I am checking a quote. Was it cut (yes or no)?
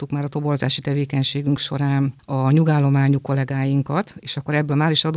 no